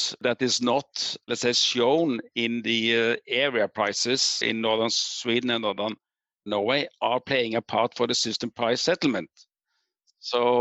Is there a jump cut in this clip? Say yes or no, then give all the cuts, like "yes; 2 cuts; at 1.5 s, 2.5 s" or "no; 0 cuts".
yes; 1 cut; at 4.4 s